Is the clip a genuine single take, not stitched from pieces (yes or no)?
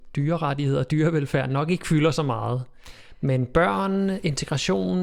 yes